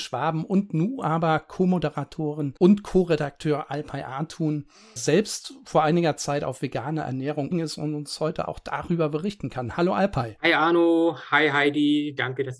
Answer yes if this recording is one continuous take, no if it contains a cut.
no